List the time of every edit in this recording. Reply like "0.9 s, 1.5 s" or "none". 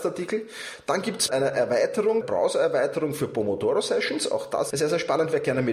1.3 s, 2.2 s, 4.7 s